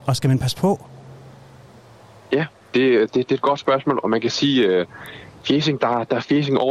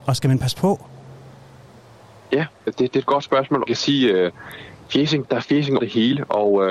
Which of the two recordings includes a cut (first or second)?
second